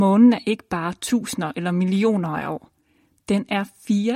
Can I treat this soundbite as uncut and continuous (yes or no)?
yes